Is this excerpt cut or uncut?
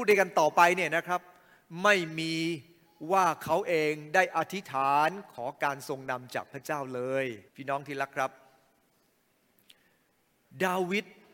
cut